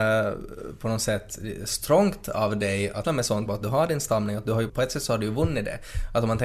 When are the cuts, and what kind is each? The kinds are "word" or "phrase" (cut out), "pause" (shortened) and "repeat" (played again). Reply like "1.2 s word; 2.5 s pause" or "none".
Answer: 3.0 s word; 3.5 s phrase; 4.7 s word